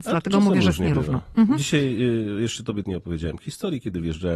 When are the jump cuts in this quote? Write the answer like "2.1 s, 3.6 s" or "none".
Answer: 2.8 s